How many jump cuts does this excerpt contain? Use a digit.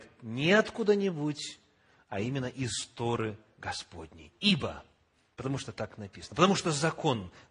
0